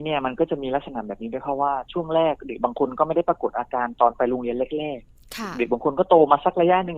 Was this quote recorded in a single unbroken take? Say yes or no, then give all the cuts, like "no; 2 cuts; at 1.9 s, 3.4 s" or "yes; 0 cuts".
no; 1 cut; at 5.0 s